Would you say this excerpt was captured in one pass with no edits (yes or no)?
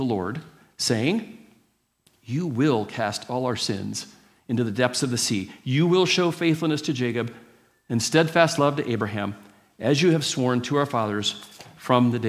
yes